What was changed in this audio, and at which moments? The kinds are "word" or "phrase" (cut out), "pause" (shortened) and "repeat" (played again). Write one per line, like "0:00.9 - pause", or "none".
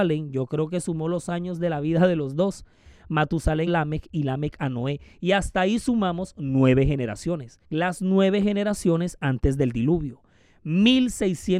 0:03.7 - word
0:07.6 - pause